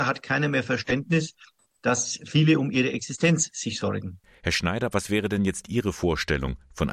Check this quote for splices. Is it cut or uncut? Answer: uncut